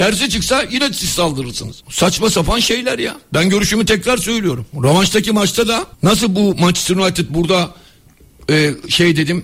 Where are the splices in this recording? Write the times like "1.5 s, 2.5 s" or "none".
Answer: 1.8 s, 4.7 s, 5.9 s